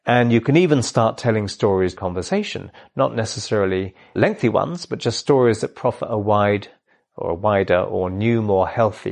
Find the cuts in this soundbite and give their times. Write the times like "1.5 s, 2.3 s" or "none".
2.0 s, 4.2 s

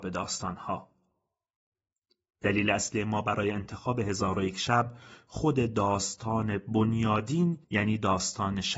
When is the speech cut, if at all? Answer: 7.6 s

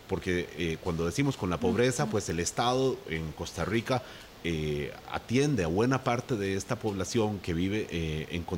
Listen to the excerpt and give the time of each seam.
none

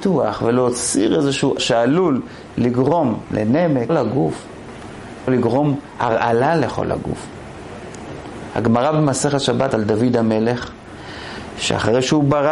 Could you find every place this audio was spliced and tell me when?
1.6 s, 3.9 s, 5.3 s, 9.7 s

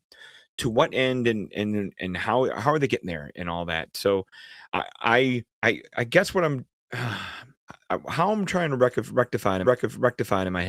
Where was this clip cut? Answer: 4.6 s, 5.5 s, 9.6 s

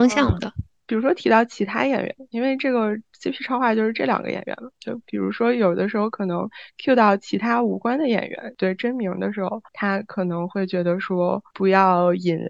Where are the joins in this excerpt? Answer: 9.7 s

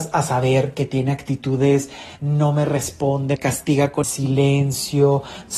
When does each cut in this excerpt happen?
2.2 s, 3.4 s, 4.0 s

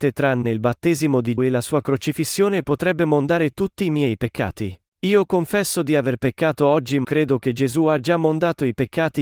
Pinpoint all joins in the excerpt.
1.4 s, 4.9 s, 7.0 s

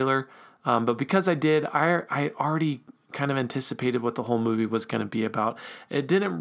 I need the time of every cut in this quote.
none

